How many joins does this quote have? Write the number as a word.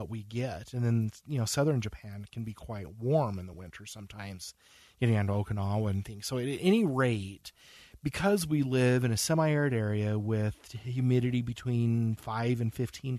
zero